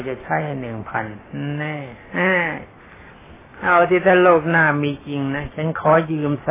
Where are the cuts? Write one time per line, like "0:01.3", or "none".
none